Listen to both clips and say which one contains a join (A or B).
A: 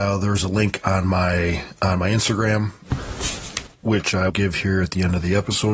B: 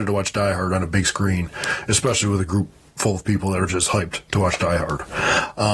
A